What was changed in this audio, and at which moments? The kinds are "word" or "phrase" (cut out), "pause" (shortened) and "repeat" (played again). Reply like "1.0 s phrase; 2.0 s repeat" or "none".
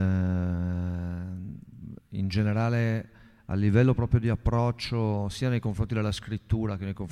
none